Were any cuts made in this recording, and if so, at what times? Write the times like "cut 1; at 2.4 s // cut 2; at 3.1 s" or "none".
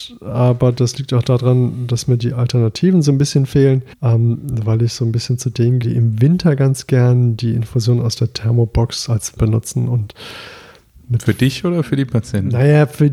cut 1; at 3.9 s // cut 2; at 5.8 s // cut 3; at 9.4 s